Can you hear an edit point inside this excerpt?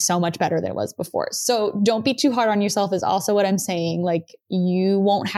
no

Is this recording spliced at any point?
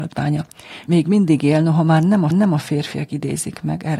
yes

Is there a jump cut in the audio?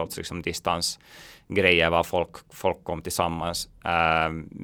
no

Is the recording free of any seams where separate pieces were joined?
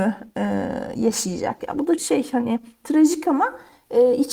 no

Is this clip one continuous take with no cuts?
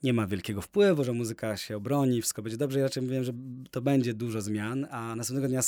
yes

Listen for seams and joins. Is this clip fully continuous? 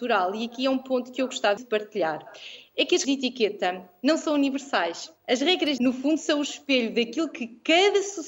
no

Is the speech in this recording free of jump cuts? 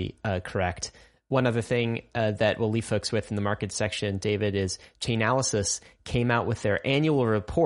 yes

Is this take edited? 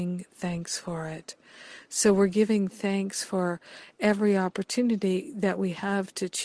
no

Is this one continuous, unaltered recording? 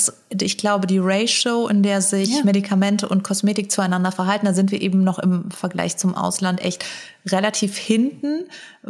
yes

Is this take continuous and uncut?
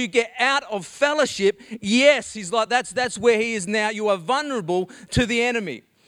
yes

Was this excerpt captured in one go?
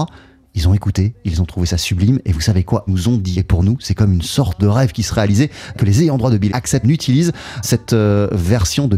no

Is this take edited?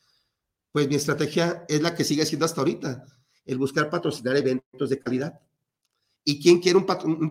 no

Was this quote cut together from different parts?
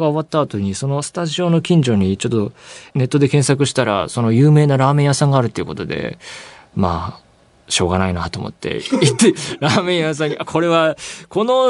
no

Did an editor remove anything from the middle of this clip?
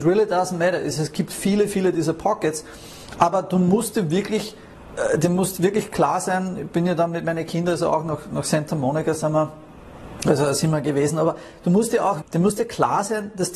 yes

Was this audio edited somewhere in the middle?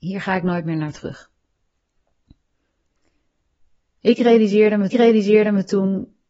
yes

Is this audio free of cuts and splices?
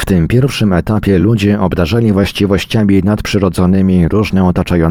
yes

